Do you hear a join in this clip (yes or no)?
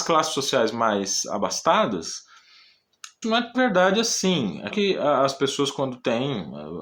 yes